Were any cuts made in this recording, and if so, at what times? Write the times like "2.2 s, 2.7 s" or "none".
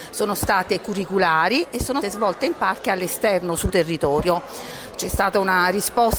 2.0 s, 2.8 s, 3.7 s